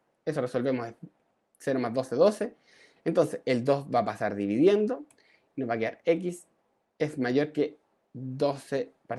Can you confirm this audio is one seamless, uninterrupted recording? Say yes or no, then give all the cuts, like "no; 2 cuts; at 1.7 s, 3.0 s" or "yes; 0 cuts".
yes; 0 cuts